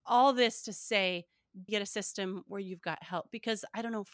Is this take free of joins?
no; 1 cut; at 1.7 s

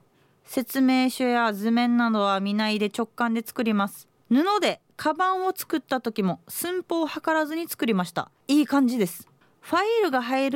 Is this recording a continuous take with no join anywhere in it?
no; 3 cuts; at 4.2 s, 8.4 s, 9.4 s

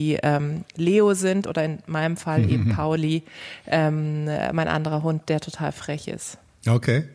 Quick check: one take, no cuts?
yes; 0 cuts

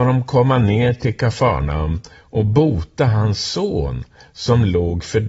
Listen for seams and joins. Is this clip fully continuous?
yes; 0 cuts

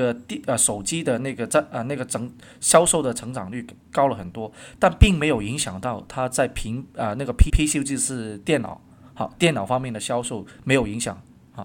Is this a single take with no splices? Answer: no; 1 cut; at 7.5 s

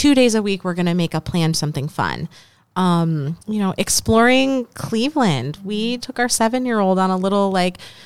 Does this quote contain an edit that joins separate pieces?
yes; 3 cuts; at 1.5 s, 3.4 s, 6.0 s

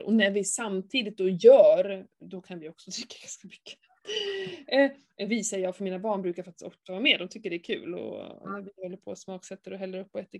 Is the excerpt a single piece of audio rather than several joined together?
yes; 0 cuts

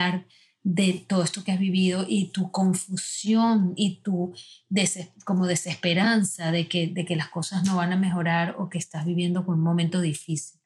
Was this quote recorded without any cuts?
yes; 0 cuts

